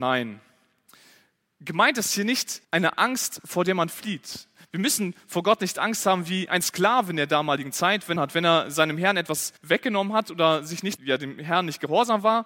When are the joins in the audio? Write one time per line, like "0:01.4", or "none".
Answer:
0:02.6
0:08.2
0:09.6
0:11.0